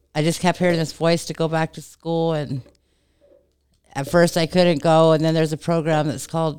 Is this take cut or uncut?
uncut